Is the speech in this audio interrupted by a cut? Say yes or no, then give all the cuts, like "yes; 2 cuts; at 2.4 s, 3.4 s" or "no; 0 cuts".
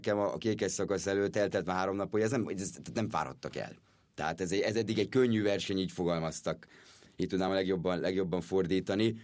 no; 0 cuts